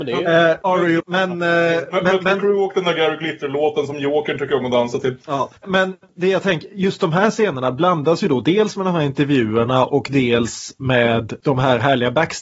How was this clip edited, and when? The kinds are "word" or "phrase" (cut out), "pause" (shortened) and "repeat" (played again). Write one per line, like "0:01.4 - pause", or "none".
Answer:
0:01.0 - phrase
0:05.6 - pause

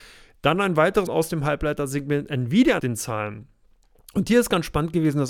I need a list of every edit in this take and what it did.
0:01.1 - word
0:02.8 - word

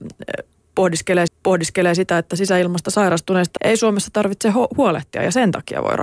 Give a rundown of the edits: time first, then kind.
0:01.3 - repeat
0:03.6 - word

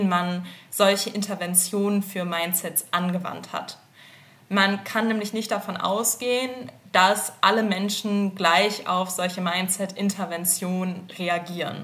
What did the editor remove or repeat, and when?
none

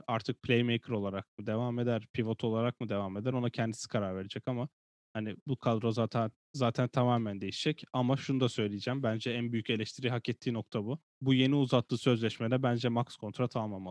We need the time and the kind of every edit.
0:11.1 - pause

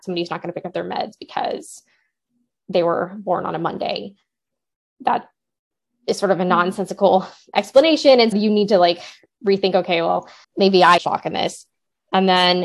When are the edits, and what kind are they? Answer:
0:08.3 - word
0:10.4 - pause
0:11.0 - phrase

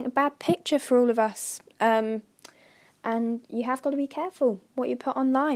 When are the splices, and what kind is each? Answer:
none

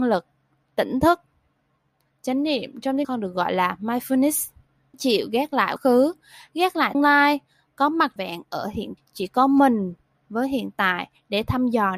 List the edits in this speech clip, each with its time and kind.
0:03.0 - word
0:04.9 - word
0:05.8 - word
0:06.9 - word
0:08.2 - word
0:09.0 - word

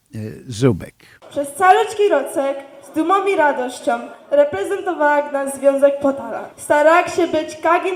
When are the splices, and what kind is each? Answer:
none

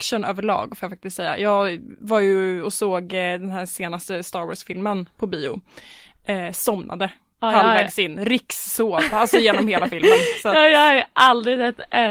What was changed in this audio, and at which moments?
none

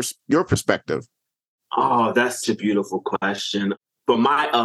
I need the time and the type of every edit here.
0:02.4 - word

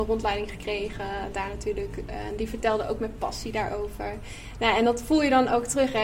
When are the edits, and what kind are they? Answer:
none

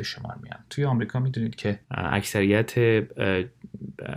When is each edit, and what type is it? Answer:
0:01.8 - pause

